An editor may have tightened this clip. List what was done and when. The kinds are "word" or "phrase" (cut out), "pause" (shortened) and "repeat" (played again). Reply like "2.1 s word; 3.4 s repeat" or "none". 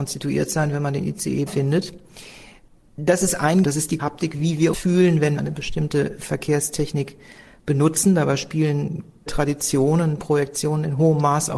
1.5 s word; 3.6 s word; 4.0 s word; 4.7 s word; 5.4 s word; 9.3 s word